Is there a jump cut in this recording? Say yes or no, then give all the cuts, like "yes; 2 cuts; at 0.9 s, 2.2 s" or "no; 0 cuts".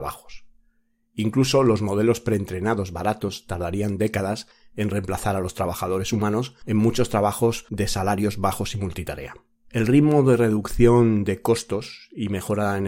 no; 0 cuts